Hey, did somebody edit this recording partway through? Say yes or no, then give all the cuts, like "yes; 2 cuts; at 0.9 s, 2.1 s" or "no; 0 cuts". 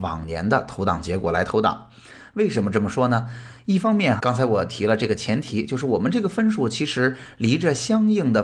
yes; 1 cut; at 4.2 s